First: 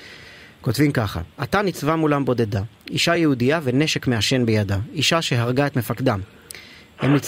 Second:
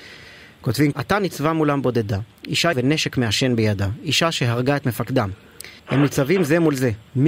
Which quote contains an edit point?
second; 3 cuts; at 0.9 s, 2.7 s, 5.8 s

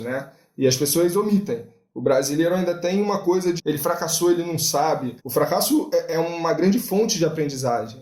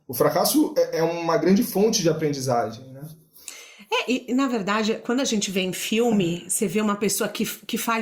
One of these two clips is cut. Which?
first; 2 cuts; at 3.6 s, 5.2 s

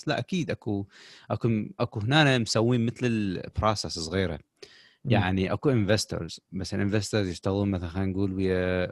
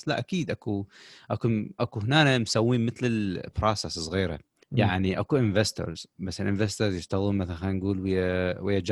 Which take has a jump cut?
second; 1 cut; at 4.6 s

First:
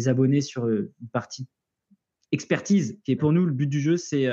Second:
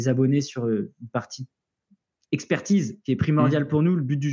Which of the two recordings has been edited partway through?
first; 1 cut; at 3.2 s

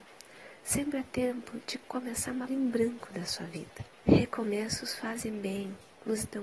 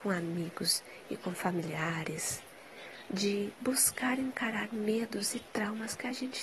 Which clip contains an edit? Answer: first; 1 cut; at 2.5 s

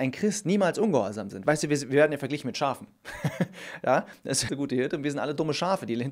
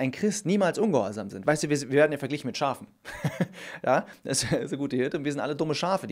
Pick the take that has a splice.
first; 1 cut; at 4.5 s

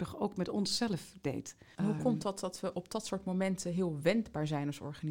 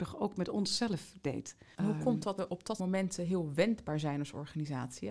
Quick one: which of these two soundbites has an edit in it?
second; 2 cuts; at 2.4 s, 2.8 s

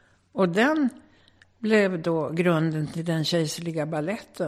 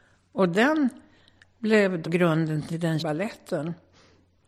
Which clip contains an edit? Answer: second; 2 cuts; at 2.0 s, 3.0 s

